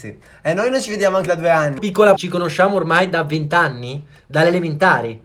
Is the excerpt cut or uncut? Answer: cut